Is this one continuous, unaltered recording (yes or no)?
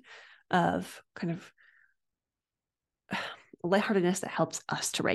yes